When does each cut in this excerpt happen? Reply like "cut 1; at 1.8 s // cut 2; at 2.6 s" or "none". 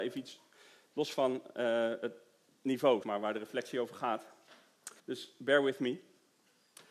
cut 1; at 3.0 s // cut 2; at 5.0 s